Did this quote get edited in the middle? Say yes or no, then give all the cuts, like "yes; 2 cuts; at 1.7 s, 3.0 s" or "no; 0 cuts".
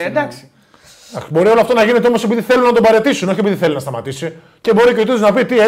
no; 0 cuts